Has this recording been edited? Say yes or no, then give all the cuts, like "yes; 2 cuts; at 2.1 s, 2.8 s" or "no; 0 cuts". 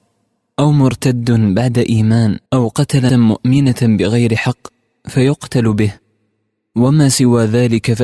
yes; 2 cuts; at 2.5 s, 3.1 s